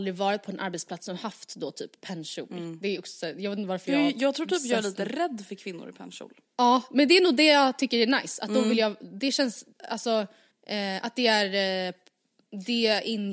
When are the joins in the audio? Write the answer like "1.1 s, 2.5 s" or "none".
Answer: 10.5 s